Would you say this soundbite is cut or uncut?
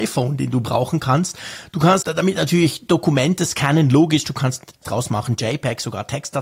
cut